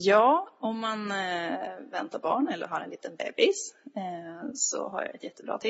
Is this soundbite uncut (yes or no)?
yes